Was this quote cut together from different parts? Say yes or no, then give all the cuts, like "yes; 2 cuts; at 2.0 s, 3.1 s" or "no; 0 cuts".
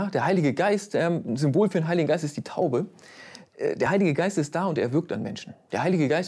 no; 0 cuts